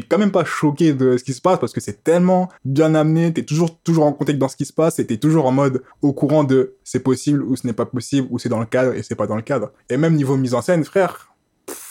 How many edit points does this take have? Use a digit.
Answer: 3